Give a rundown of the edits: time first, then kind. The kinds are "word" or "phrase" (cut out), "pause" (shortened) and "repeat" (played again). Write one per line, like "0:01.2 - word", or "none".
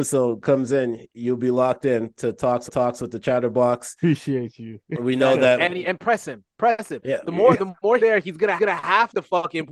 0:02.7 - repeat
0:05.8 - word
0:08.0 - phrase
0:08.6 - repeat